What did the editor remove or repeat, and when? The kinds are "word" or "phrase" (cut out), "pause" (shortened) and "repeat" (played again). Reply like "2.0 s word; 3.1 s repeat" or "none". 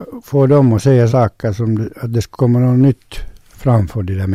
1.1 s word